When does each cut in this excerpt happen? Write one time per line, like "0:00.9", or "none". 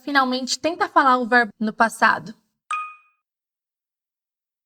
0:01.5